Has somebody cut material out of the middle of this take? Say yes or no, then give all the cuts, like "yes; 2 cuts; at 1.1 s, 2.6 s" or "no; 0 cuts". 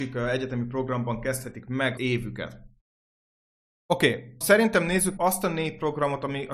yes; 3 cuts; at 2.0 s, 4.4 s, 5.2 s